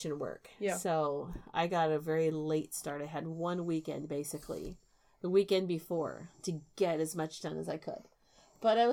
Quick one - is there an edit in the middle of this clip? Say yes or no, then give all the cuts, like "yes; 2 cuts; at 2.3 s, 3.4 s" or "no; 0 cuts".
no; 0 cuts